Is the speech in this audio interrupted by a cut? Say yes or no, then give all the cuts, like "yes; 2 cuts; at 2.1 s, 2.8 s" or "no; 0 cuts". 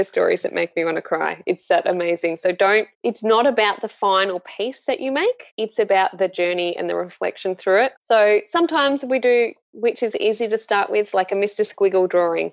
yes; 4 cuts; at 2.9 s, 5.5 s, 8.0 s, 9.6 s